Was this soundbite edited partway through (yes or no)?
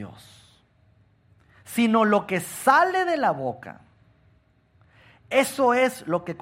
no